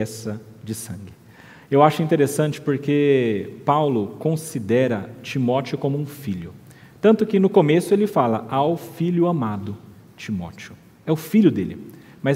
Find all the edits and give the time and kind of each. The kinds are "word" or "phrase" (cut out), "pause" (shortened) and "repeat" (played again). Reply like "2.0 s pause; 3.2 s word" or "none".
none